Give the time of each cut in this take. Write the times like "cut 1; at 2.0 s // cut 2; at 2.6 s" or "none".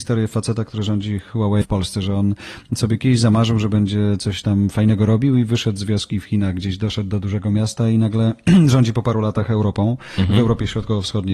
cut 1; at 1.6 s